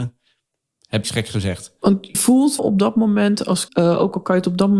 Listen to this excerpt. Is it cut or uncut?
cut